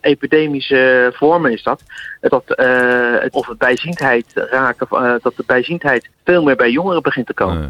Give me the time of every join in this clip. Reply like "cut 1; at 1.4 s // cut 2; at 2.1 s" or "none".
cut 1; at 2.3 s // cut 2; at 3.3 s // cut 3; at 6.1 s